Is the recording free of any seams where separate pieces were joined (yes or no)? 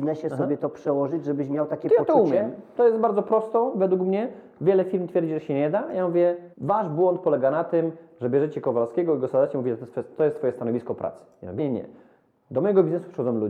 no